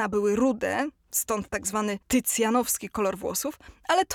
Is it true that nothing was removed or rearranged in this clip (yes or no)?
no